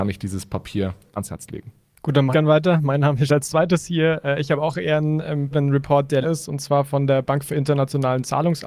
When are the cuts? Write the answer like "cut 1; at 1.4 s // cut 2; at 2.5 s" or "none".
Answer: cut 1; at 1.2 s // cut 2; at 2.3 s // cut 3; at 3.3 s // cut 4; at 5.5 s // cut 5; at 6.2 s